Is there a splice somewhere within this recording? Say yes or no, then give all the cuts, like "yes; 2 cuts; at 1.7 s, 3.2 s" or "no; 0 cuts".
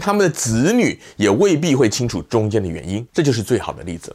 yes; 1 cut; at 3.1 s